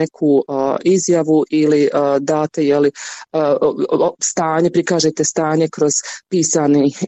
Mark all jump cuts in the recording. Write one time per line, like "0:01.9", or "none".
none